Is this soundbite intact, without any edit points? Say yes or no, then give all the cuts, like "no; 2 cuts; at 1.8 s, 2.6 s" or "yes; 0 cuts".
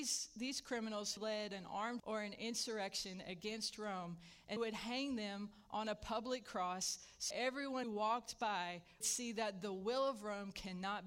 no; 6 cuts; at 1.2 s, 2.0 s, 4.6 s, 7.3 s, 7.8 s, 9.0 s